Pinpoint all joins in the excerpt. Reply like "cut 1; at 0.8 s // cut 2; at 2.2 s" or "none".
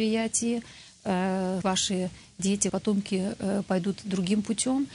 cut 1; at 1.6 s // cut 2; at 2.7 s